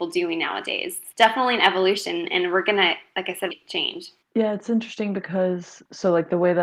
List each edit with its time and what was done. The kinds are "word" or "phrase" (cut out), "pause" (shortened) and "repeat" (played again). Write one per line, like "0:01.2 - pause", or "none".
0:01.1 - word
0:03.5 - phrase
0:04.2 - pause